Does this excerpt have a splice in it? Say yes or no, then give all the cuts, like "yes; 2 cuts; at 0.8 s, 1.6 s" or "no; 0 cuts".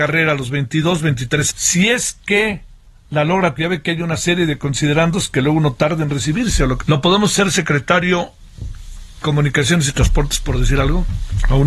yes; 4 cuts; at 1.5 s, 3.6 s, 6.8 s, 9.2 s